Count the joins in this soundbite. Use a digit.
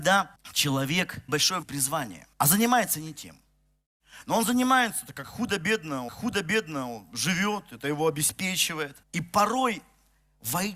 5